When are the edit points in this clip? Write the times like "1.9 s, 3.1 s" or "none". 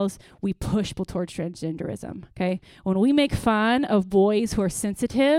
1.0 s, 2.3 s